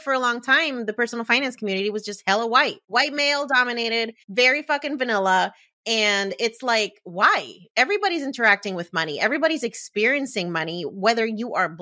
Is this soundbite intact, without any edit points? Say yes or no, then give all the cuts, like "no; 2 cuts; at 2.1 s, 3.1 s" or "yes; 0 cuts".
no; 1 cut; at 4.2 s